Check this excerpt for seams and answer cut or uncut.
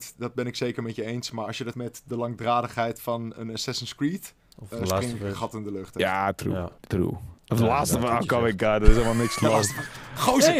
cut